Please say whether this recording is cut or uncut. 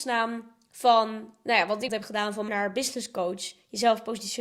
cut